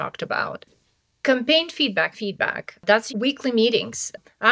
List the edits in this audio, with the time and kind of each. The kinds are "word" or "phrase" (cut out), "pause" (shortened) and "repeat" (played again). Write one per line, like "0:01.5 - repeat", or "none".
0:02.1 - word
0:03.1 - word